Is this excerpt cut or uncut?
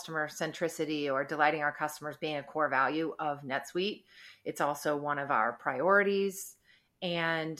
uncut